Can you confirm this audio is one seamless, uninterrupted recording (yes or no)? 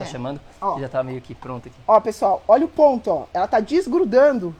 yes